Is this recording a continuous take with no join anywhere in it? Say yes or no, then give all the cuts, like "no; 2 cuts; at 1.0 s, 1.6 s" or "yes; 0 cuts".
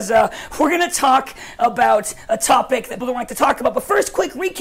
no; 1 cut; at 3.0 s